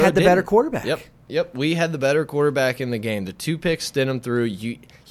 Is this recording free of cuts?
yes; 0 cuts

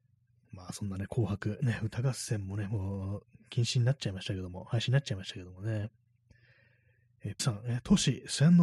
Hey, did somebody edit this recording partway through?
yes; 1 cut; at 7.4 s

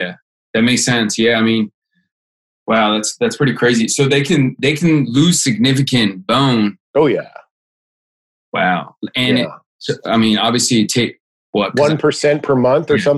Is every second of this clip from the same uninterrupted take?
yes; 0 cuts

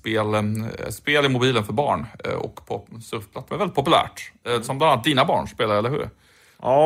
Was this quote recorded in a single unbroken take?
no; 1 cut; at 3.5 s

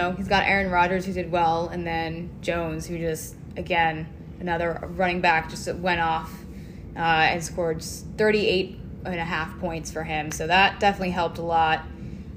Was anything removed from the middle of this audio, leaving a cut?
no; 0 cuts

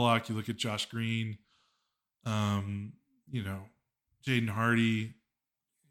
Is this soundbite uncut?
yes; 0 cuts

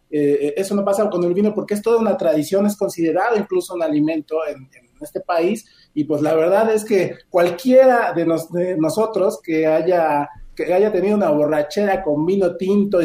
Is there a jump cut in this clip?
no; 0 cuts

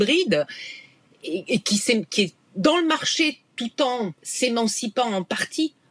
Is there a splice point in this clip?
yes; 1 cut; at 4.2 s

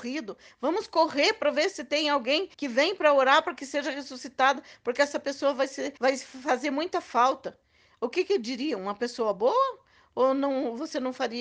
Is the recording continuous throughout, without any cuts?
no; 2 cuts; at 2.5 s, 6.0 s

